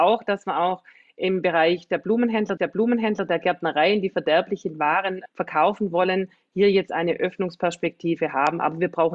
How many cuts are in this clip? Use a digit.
2